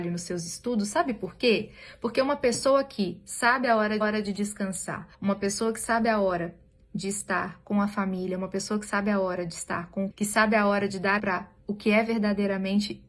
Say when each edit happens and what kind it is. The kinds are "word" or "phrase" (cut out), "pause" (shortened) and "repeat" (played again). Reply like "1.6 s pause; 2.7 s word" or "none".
4.0 s repeat; 5.1 s pause; 10.1 s word; 11.2 s word